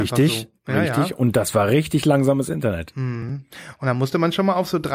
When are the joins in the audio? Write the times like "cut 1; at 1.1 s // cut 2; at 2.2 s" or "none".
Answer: none